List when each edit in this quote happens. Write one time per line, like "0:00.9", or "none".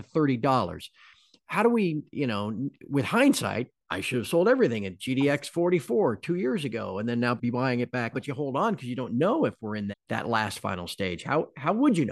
0:07.4
0:08.1
0:09.9